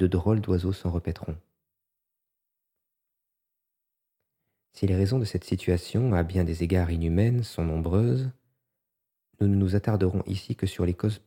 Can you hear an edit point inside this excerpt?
no; 0 cuts

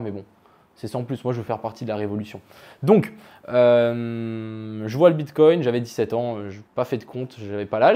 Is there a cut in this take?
yes; 1 cut; at 6.7 s

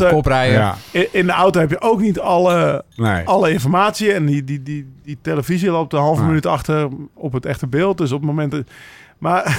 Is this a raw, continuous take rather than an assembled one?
yes; 0 cuts

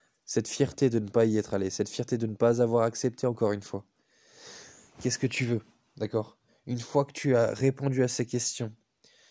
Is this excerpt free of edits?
yes; 0 cuts

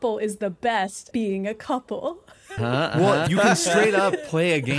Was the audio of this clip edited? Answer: yes; 3 cuts; at 1.1 s, 2.6 s, 3.3 s

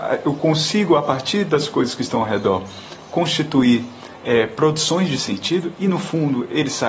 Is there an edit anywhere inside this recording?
no; 0 cuts

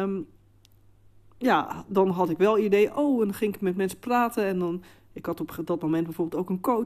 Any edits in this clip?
no; 0 cuts

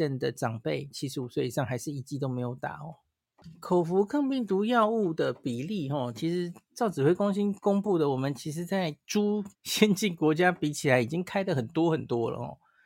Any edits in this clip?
yes; 1 cut; at 9.5 s

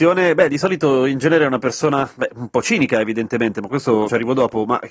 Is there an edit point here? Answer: no; 0 cuts

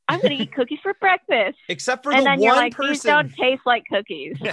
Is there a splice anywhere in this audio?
no; 0 cuts

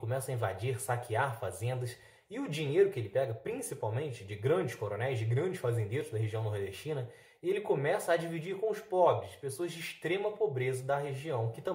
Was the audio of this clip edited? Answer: no; 0 cuts

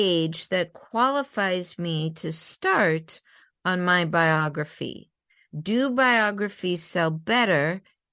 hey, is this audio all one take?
yes; 0 cuts

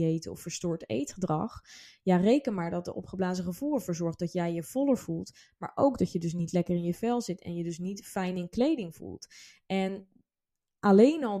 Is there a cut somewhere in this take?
no; 0 cuts

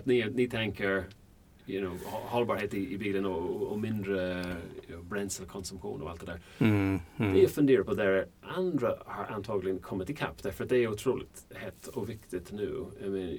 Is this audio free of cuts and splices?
yes; 0 cuts

